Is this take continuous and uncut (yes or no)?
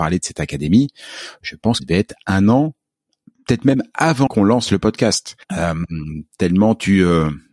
no